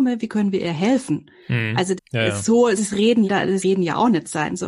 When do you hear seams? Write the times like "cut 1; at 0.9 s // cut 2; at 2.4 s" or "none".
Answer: cut 1; at 2.0 s // cut 2; at 2.8 s // cut 3; at 3.3 s // cut 4; at 3.6 s